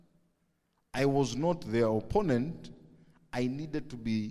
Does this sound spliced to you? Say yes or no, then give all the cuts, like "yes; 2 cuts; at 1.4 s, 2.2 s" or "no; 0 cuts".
no; 0 cuts